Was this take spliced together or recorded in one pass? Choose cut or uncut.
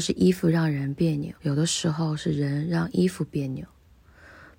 cut